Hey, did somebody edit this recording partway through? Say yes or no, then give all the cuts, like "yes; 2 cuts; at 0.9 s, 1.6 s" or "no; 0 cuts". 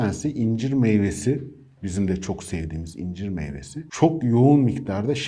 no; 0 cuts